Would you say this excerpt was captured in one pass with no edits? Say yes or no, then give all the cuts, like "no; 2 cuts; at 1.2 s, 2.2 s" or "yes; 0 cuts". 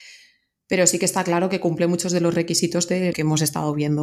no; 1 cut; at 3.1 s